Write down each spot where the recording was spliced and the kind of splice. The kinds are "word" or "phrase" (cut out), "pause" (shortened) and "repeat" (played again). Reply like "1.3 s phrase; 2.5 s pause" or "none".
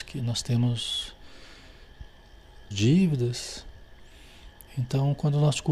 2.7 s phrase; 4.7 s pause